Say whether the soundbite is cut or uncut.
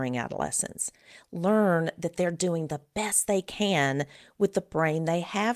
uncut